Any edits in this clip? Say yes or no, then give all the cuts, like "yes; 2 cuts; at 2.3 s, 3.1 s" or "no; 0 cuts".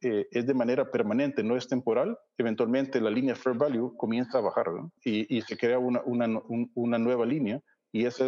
yes; 2 cuts; at 2.3 s, 5.0 s